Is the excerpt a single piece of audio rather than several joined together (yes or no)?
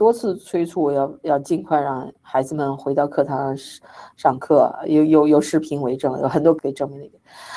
no